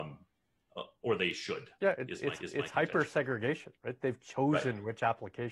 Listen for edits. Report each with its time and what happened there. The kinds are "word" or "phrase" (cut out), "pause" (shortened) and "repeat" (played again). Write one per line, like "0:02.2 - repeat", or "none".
0:01.8 - pause
0:02.4 - repeat